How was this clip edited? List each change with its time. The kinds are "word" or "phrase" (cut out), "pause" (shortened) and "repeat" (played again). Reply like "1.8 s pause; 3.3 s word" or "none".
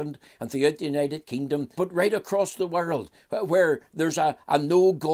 1.7 s word